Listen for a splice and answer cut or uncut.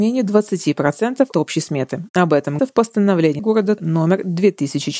cut